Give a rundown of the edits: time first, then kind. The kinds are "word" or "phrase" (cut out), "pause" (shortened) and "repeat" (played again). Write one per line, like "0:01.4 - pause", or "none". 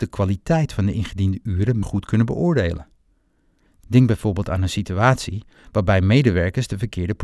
0:01.8 - word